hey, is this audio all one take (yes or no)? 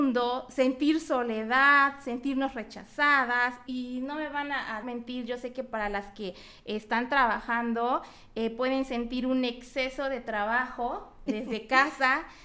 no